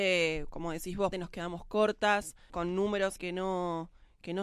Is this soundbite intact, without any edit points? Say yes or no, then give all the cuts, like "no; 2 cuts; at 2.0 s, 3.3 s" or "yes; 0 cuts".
no; 3 cuts; at 1.1 s, 2.5 s, 3.2 s